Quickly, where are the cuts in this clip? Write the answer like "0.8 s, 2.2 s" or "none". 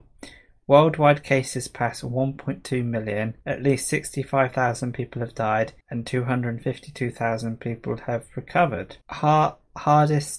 3.4 s, 5.8 s, 9.0 s